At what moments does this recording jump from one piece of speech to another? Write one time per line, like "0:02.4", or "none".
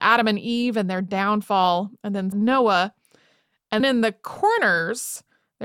0:02.3
0:03.8

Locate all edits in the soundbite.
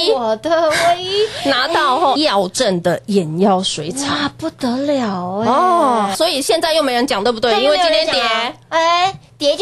0:02.2
0:06.1

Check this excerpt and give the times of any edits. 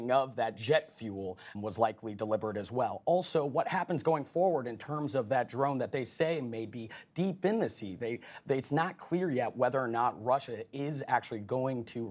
0:01.5

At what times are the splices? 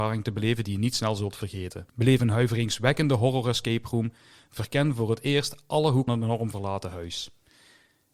0:01.9
0:06.1

